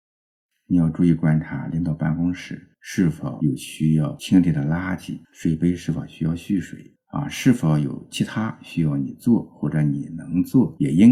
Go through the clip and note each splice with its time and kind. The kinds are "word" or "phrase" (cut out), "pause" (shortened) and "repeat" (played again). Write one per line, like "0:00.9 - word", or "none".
0:02.7 - pause
0:05.2 - pause
0:07.0 - pause